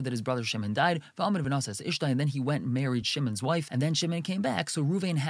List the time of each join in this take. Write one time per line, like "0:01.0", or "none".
none